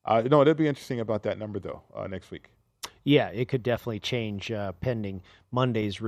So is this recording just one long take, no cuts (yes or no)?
yes